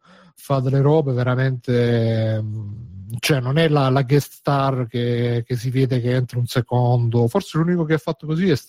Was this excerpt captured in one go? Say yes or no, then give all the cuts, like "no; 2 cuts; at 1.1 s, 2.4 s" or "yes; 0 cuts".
yes; 0 cuts